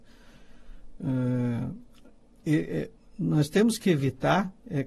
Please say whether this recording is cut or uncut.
uncut